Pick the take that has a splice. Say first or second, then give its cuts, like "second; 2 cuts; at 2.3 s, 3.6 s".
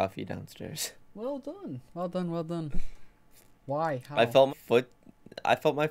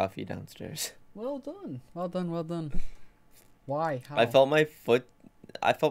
first; 1 cut; at 4.5 s